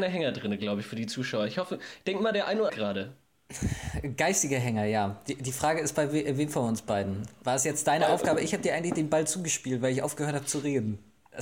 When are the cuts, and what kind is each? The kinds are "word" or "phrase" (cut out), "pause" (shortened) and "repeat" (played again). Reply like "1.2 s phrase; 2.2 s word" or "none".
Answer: 2.7 s phrase